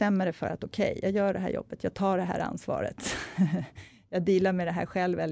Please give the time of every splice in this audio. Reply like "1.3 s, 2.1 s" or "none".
none